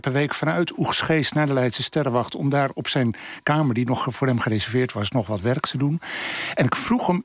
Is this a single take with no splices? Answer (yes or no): yes